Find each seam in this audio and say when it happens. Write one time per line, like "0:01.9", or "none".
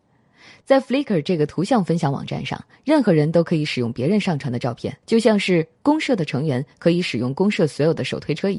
0:05.0